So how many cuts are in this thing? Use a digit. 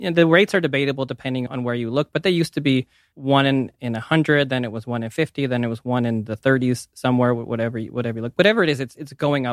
0